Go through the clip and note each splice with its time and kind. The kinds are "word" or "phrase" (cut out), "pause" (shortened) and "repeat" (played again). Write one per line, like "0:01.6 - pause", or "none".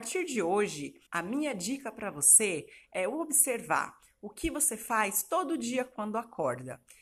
0:01.1 - pause